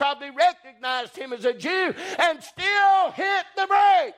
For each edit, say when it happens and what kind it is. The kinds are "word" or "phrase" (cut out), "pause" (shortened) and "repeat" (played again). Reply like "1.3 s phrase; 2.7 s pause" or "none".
none